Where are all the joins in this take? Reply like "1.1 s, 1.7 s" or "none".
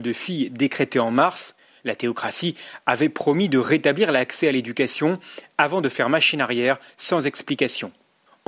none